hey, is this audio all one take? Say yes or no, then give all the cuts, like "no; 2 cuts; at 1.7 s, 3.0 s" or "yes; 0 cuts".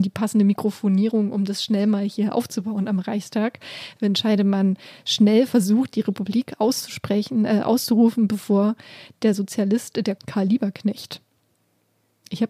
no; 1 cut; at 10.2 s